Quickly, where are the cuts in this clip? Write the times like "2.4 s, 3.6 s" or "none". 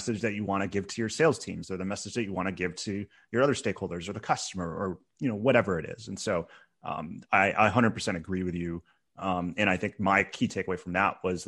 none